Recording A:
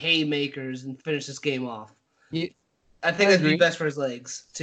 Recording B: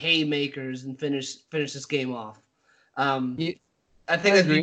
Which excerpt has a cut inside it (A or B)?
A